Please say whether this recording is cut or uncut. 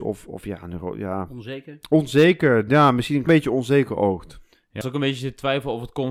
cut